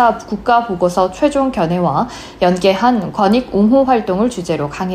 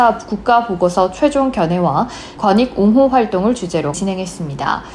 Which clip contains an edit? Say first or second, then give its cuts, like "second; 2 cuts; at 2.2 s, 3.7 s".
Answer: second; 2 cuts; at 2.4 s, 3.9 s